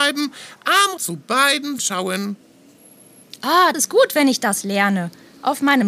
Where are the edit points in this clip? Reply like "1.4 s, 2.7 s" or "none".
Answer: 1.0 s, 1.8 s, 3.7 s